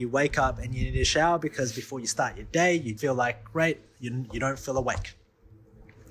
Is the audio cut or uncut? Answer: cut